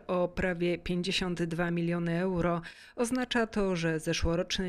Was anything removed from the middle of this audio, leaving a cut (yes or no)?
no